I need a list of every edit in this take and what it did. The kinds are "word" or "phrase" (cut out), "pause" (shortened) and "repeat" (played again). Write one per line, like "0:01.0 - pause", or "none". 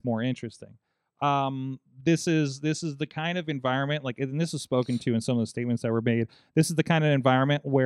none